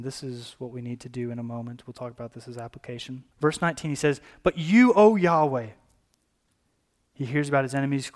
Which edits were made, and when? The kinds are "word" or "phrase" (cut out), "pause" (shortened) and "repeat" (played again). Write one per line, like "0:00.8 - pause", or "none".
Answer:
0:03.3 - pause